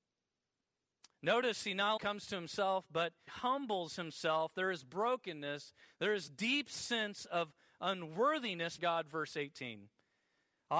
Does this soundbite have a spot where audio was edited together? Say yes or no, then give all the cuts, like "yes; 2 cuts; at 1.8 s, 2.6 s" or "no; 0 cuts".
yes; 4 cuts; at 2.0 s, 3.3 s, 6.3 s, 8.8 s